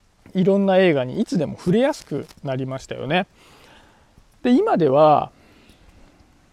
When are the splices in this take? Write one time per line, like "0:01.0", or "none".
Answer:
none